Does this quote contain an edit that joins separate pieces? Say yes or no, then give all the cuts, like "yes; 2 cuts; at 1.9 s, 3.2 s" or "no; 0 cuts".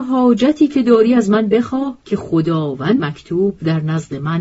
yes; 2 cuts; at 2.0 s, 3.0 s